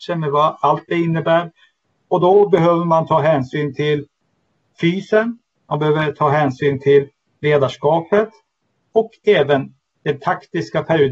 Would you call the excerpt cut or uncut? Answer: uncut